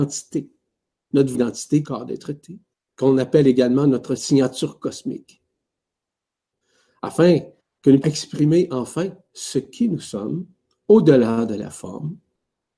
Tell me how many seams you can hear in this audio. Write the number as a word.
six